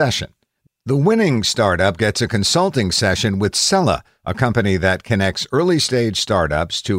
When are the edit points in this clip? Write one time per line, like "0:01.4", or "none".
none